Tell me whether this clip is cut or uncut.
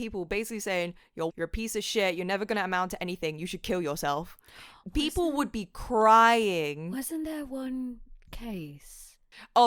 cut